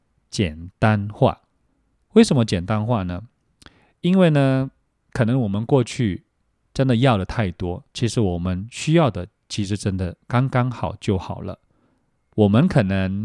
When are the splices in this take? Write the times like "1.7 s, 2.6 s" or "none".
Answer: 7.9 s, 10.2 s